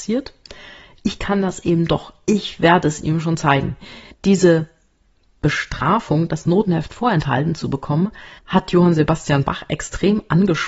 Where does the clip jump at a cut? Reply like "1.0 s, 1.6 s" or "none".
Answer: 4.1 s, 8.4 s

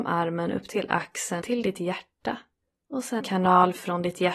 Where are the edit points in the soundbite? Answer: 1.4 s, 2.6 s, 3.2 s

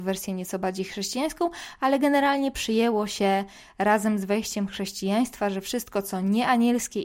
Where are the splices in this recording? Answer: none

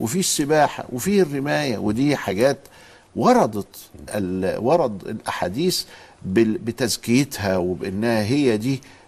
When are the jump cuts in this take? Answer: 4.1 s

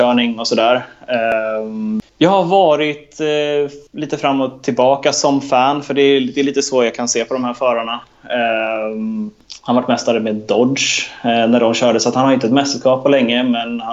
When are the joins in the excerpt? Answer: 3.9 s

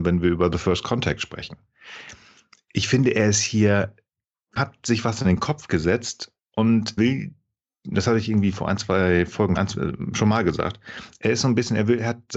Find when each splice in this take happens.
4.6 s, 7.0 s, 9.6 s

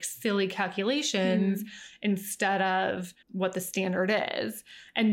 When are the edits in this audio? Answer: 3.2 s

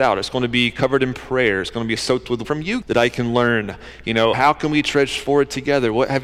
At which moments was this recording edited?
2.0 s, 2.4 s, 2.8 s, 4.3 s

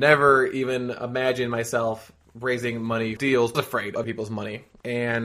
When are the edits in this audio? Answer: 2.2 s, 3.2 s, 3.5 s, 4.0 s

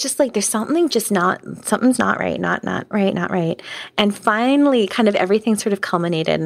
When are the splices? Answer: 2.0 s, 2.9 s

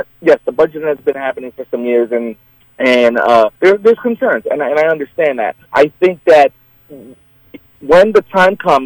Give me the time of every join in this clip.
2.6 s, 3.5 s, 5.6 s

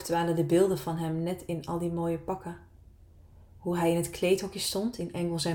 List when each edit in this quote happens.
none

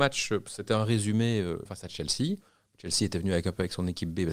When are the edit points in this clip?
1.7 s

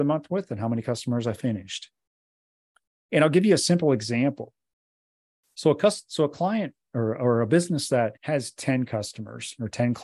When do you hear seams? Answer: 8.2 s

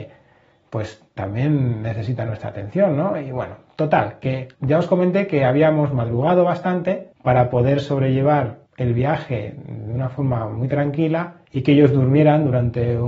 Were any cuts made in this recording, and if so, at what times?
4.5 s, 7.1 s, 8.7 s, 11.4 s

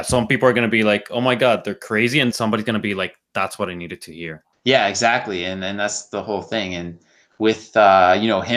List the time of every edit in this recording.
2.3 s, 4.5 s

